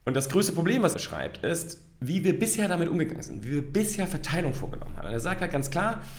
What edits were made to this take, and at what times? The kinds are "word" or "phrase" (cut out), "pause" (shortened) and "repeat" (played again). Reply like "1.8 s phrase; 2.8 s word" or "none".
0.9 s word